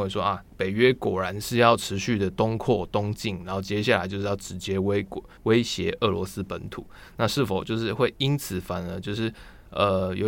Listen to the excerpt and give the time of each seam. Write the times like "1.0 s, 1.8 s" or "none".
5.4 s

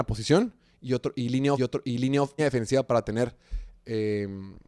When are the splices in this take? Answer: 1.6 s, 2.4 s

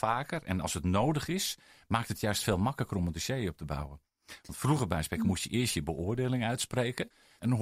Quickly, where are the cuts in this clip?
none

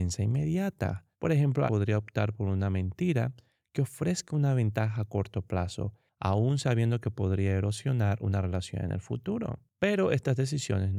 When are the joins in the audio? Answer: 1.1 s, 1.7 s

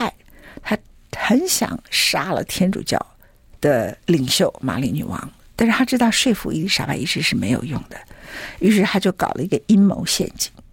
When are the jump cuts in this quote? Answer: 4.0 s

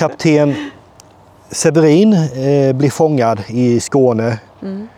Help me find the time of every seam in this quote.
none

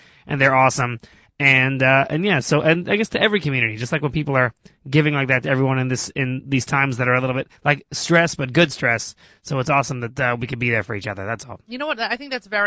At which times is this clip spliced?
7.6 s

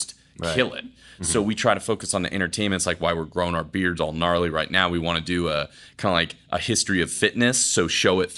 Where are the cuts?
none

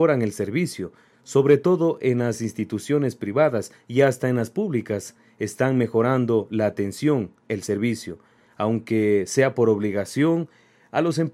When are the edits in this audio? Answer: none

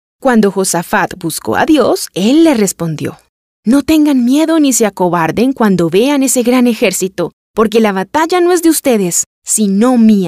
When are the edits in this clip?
none

